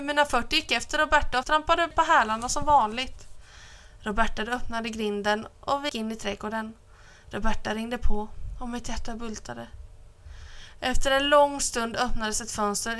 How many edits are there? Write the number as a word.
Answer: three